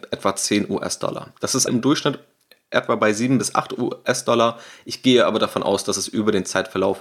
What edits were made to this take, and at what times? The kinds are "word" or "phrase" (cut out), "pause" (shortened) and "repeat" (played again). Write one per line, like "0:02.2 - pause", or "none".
0:01.7 - word